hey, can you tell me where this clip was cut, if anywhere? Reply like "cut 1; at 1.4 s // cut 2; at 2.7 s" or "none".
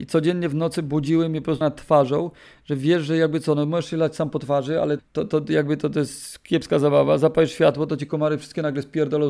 cut 1; at 1.6 s // cut 2; at 5.0 s

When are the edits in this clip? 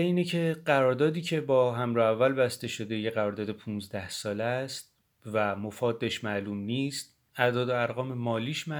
cut 1; at 5.0 s

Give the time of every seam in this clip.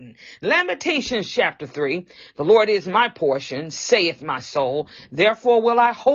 none

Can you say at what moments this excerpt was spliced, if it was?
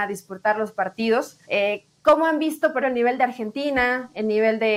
cut 1; at 1.4 s // cut 2; at 2.8 s

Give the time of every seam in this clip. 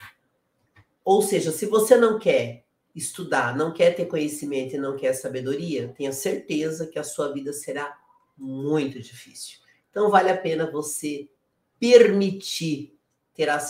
none

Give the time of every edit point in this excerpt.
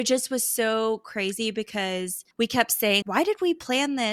cut 1; at 2.3 s // cut 2; at 3.0 s

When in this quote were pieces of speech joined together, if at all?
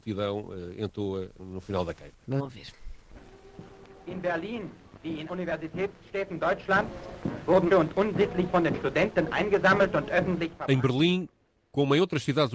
cut 1; at 1.4 s // cut 2; at 2.4 s // cut 3; at 5.3 s // cut 4; at 7.7 s // cut 5; at 8.5 s

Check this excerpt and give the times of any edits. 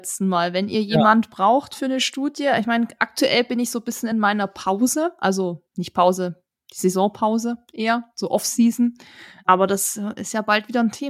none

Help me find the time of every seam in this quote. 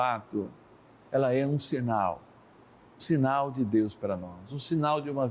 cut 1; at 3.0 s

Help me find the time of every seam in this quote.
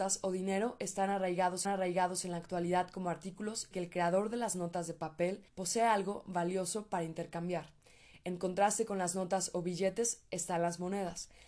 cut 1; at 1.6 s // cut 2; at 3.7 s // cut 3; at 5.5 s

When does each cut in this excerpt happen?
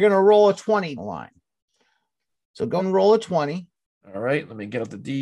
cut 1; at 1.0 s // cut 2; at 2.8 s

